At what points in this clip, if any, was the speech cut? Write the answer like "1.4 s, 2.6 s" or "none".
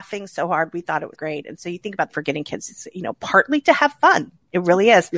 1.1 s, 2.1 s